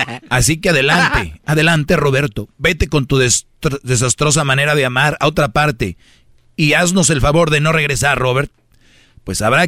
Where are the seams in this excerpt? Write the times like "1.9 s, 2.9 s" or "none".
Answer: none